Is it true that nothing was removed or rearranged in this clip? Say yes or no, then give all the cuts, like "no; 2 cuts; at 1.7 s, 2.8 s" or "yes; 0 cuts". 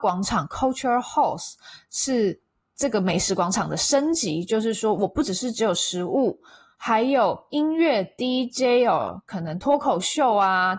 yes; 0 cuts